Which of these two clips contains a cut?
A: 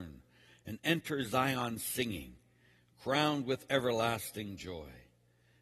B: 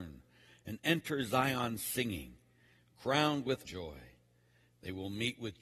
B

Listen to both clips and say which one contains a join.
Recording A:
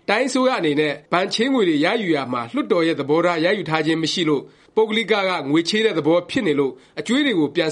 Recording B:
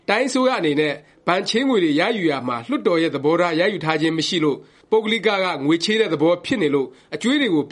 A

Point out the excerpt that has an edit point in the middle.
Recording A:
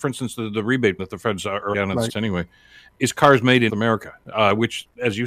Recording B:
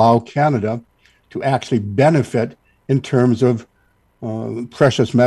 A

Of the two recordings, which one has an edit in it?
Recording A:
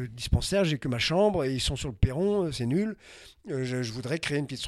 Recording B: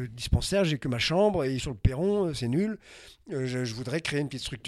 B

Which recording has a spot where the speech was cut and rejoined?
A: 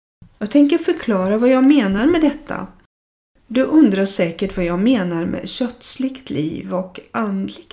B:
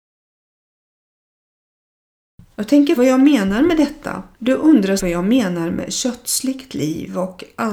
B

